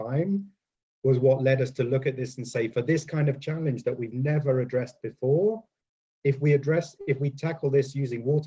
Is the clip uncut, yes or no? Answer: yes